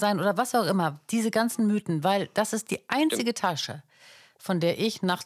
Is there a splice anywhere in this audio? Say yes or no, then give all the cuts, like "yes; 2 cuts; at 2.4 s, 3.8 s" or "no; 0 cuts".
no; 0 cuts